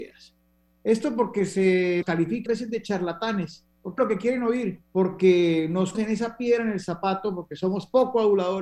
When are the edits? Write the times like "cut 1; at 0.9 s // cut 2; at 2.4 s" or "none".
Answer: cut 1; at 2.0 s // cut 2; at 2.5 s // cut 3; at 4.0 s // cut 4; at 4.8 s // cut 5; at 5.9 s